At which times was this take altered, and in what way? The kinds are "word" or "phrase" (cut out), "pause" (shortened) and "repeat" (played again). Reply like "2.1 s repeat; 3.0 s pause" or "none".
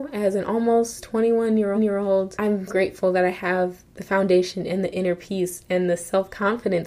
1.7 s repeat; 2.7 s word